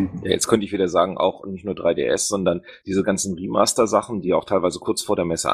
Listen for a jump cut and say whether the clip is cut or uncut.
uncut